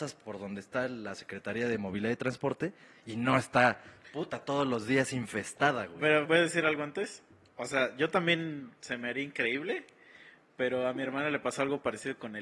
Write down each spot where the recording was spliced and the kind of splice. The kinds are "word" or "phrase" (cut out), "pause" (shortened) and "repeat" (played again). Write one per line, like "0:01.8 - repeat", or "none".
0:06.2 - word